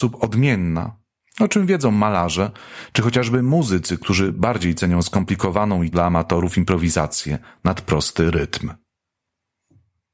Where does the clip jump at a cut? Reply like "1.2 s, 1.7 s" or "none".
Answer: 5.9 s